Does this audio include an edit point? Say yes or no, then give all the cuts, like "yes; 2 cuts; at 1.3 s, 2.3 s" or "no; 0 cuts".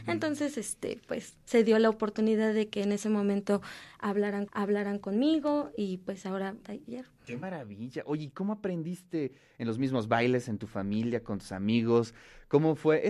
yes; 2 cuts; at 4.5 s, 6.6 s